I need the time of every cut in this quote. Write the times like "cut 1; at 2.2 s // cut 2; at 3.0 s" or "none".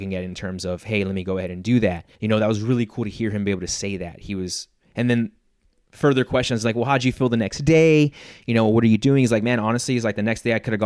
cut 1; at 2.1 s